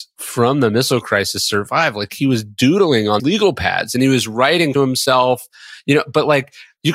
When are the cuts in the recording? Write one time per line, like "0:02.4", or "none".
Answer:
0:03.2
0:04.7